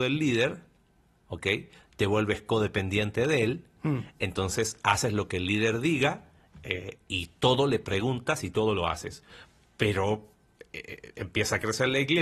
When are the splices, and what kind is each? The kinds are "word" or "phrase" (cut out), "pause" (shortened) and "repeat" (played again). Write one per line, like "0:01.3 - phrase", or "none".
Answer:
none